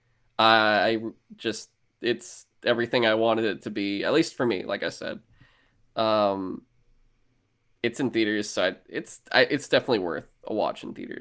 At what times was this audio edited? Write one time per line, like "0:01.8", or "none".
none